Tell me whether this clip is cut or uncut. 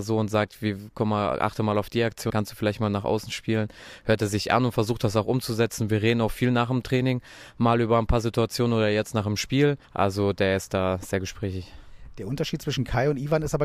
cut